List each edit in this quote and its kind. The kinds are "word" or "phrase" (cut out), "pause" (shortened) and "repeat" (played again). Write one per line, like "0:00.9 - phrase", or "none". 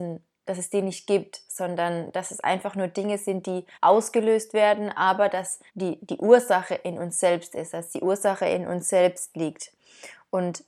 0:03.7 - pause
0:05.7 - pause